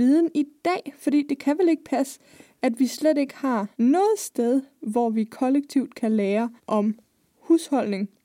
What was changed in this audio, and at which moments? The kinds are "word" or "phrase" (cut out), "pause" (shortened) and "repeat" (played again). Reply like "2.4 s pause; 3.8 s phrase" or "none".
3.7 s pause; 6.6 s pause